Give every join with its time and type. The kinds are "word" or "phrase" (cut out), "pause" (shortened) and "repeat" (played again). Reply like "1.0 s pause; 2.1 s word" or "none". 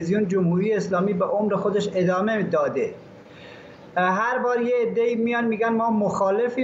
none